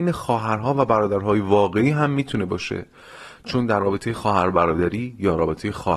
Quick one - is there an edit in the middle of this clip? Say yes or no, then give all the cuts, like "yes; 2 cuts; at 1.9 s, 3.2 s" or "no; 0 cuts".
no; 0 cuts